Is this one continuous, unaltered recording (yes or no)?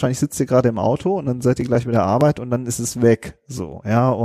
yes